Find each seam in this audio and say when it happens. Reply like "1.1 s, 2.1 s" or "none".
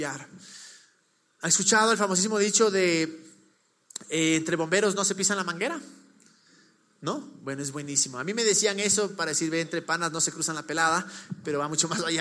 none